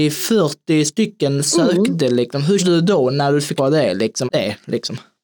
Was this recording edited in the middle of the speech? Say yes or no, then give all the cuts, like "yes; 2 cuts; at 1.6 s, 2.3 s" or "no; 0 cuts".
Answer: yes; 4 cuts; at 1.5 s, 2.6 s, 3.6 s, 4.3 s